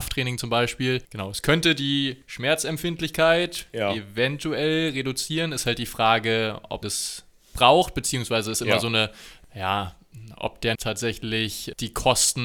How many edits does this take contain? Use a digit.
3